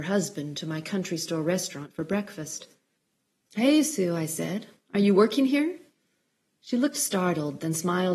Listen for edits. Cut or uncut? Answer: uncut